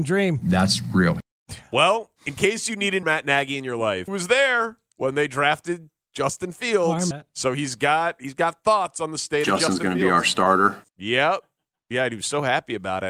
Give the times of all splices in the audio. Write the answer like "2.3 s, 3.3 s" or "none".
2.2 s, 3.0 s, 4.1 s, 7.1 s, 10.9 s